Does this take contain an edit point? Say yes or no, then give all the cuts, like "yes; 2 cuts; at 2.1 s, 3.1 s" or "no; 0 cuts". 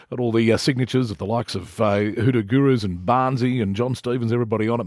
no; 0 cuts